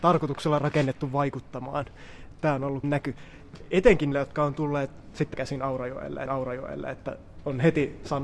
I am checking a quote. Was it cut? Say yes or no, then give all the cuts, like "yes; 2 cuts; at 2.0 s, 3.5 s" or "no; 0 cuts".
yes; 4 cuts; at 2.8 s, 4.1 s, 5.3 s, 6.3 s